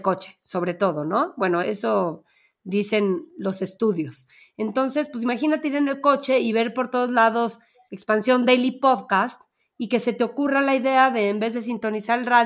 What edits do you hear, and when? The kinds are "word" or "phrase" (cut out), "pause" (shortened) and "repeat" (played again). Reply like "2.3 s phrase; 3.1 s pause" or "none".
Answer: 1.6 s word